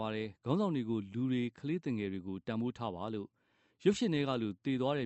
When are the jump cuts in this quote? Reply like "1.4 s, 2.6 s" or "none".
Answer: none

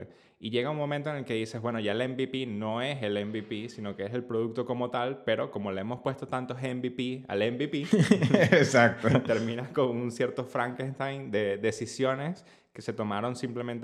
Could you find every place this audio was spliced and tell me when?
none

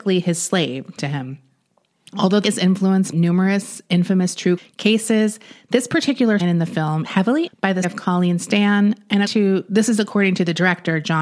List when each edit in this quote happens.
1.0 s, 2.4 s, 3.1 s, 4.6 s, 6.4 s, 7.0 s, 7.5 s, 7.8 s, 9.3 s

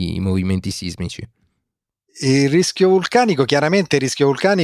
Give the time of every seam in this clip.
none

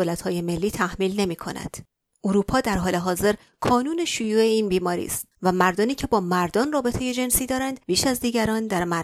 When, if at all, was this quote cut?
7.8 s

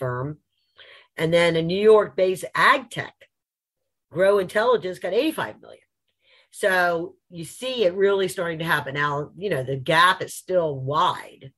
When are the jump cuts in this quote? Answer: none

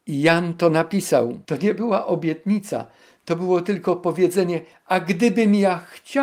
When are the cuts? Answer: 1.4 s

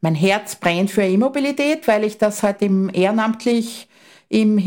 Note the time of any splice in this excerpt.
none

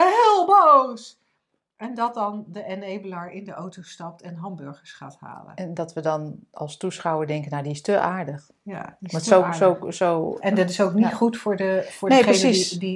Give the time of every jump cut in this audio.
none

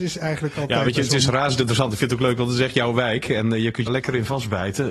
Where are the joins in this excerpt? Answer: 3.9 s

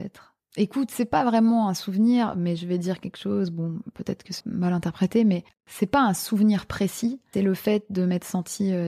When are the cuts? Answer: 4.4 s, 7.3 s

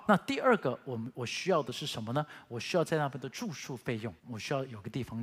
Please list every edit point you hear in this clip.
4.2 s

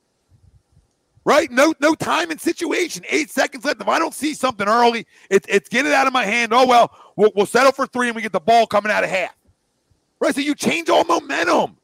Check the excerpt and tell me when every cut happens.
none

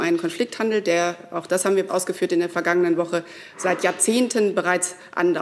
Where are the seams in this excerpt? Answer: 1.9 s

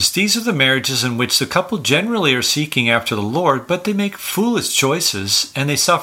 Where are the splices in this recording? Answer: none

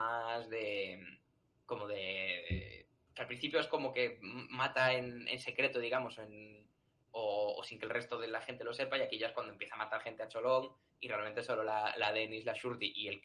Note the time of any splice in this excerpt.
none

